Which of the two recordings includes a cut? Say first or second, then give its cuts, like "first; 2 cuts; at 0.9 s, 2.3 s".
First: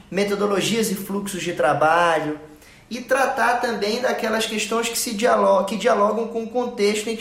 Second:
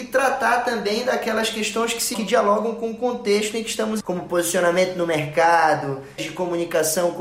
second; 3 cuts; at 2.1 s, 4.0 s, 6.2 s